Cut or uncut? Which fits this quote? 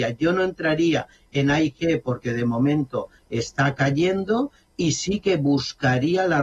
uncut